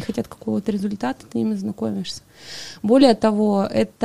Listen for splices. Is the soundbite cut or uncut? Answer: cut